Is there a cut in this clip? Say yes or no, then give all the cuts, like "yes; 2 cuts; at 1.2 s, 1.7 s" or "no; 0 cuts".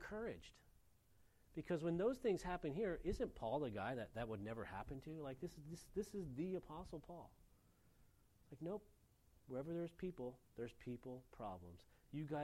no; 0 cuts